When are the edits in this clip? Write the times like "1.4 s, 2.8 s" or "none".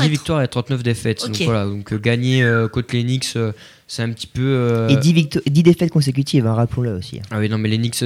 none